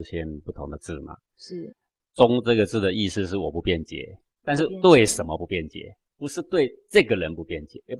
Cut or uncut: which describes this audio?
cut